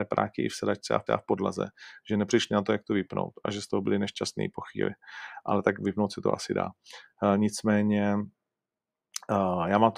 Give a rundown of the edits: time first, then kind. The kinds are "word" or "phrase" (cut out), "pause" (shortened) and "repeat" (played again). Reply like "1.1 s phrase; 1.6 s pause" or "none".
1.1 s repeat